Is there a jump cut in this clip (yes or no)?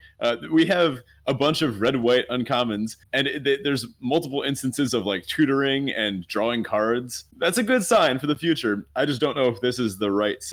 no